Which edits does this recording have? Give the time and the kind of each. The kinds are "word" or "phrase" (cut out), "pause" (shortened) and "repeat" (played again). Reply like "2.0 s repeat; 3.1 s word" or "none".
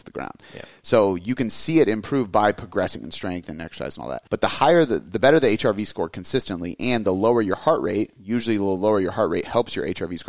4.3 s pause